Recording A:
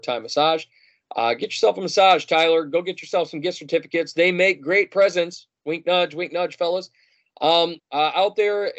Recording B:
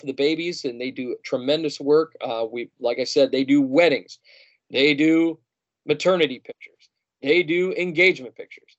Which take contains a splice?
A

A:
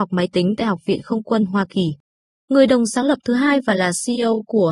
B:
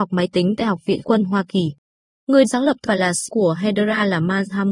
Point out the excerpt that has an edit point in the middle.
B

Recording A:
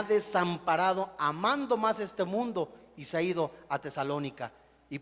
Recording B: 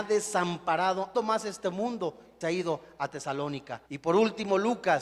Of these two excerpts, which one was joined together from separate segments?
B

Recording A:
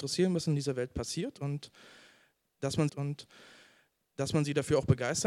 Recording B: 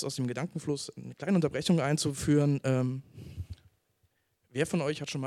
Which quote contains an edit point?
A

